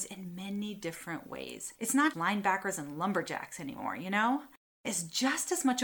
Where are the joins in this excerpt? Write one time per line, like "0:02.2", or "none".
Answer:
0:01.8
0:02.1
0:04.8